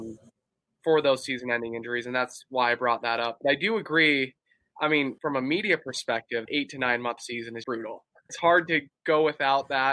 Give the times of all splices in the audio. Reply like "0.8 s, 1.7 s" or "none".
5.2 s, 6.5 s, 7.2 s, 7.6 s, 8.3 s